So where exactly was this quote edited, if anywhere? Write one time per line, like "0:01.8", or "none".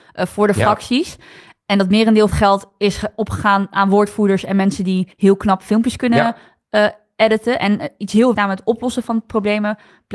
0:02.3
0:05.1
0:08.3